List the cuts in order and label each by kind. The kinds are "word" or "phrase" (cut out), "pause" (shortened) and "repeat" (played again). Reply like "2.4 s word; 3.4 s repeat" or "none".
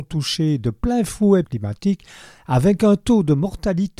1.4 s phrase